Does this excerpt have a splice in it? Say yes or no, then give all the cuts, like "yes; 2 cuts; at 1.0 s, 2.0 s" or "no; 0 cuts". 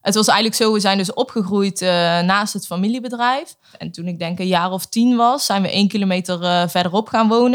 no; 0 cuts